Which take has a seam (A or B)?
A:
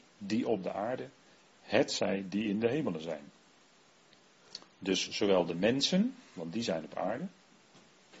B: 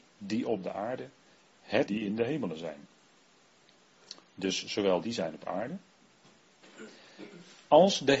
B